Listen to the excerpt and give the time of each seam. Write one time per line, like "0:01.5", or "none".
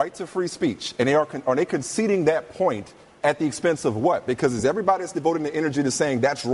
none